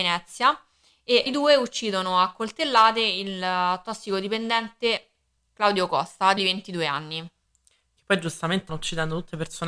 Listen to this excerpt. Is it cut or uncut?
cut